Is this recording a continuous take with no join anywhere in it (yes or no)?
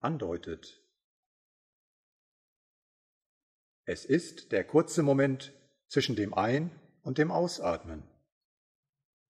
yes